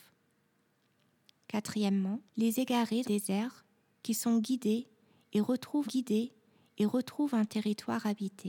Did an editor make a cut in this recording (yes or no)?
yes